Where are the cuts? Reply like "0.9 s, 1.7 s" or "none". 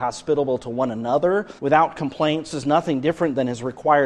1.6 s, 2.5 s